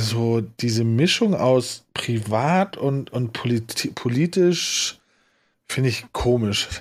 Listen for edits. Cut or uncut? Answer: uncut